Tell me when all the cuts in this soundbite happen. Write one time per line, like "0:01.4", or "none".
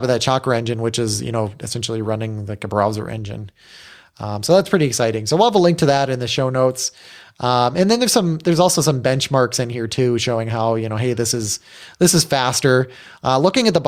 none